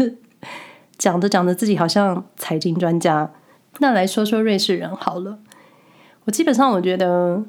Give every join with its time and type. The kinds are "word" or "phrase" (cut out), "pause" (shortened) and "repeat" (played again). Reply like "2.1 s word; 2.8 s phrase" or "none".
3.6 s pause